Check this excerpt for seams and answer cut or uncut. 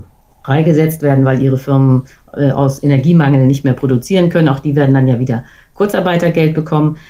uncut